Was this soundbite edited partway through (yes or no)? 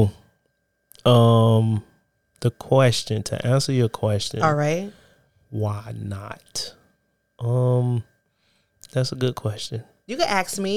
no